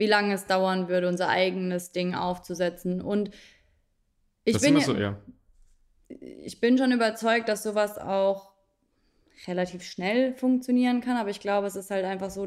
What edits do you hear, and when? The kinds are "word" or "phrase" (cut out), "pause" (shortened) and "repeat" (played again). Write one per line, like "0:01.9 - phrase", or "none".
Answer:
none